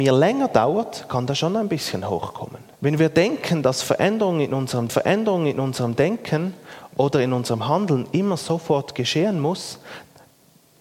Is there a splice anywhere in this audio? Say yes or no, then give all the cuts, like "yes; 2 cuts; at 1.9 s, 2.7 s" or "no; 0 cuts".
yes; 2 cuts; at 2.7 s, 4.9 s